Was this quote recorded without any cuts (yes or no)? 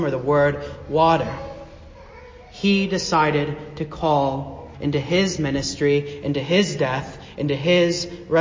no